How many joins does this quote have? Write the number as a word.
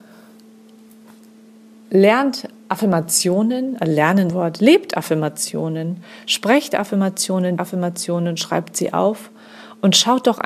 two